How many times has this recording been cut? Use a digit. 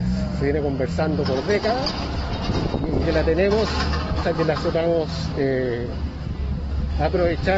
2